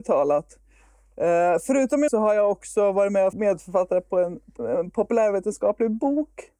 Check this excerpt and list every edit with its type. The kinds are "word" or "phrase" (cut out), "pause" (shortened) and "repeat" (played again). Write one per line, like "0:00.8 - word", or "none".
0:02.1 - word
0:03.3 - word
0:04.6 - word